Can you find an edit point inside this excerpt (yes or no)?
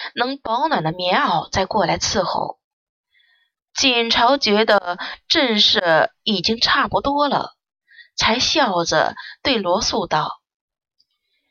no